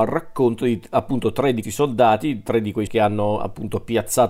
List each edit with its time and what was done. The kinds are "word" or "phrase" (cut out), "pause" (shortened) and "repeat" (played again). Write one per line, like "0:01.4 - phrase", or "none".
0:01.6 - word
0:02.9 - word